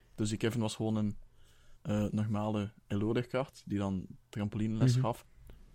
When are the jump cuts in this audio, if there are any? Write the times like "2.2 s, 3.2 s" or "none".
1.8 s